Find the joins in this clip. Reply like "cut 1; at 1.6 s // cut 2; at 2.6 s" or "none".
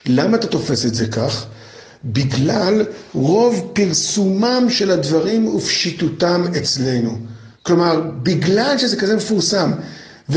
cut 1; at 3.1 s // cut 2; at 7.5 s